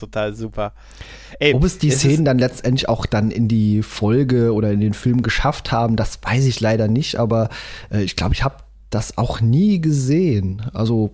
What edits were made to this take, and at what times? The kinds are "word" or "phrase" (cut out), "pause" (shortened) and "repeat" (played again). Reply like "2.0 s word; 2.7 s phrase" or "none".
none